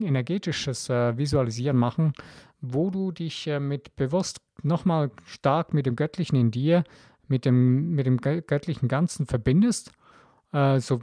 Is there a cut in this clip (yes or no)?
no